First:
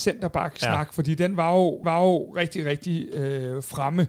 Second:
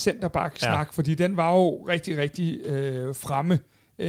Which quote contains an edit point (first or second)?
first